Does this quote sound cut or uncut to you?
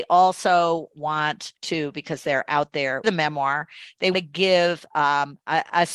cut